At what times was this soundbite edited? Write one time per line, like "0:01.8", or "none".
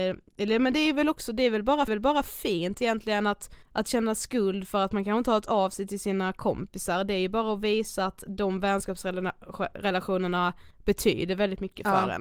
0:01.9
0:03.6
0:10.7